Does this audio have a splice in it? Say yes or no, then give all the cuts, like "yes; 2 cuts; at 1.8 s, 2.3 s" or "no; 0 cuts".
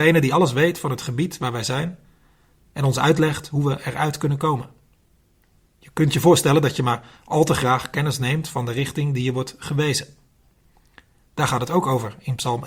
no; 0 cuts